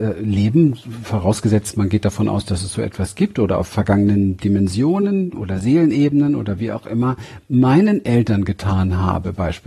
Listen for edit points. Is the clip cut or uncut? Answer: uncut